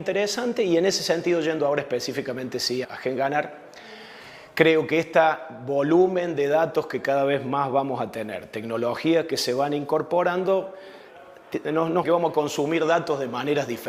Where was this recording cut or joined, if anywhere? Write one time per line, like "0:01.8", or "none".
0:02.8
0:12.0